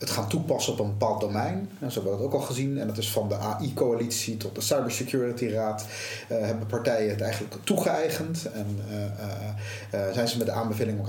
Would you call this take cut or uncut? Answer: uncut